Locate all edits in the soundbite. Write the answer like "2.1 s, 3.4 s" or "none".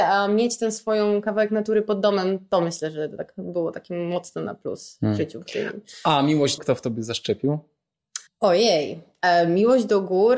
6.6 s, 8.3 s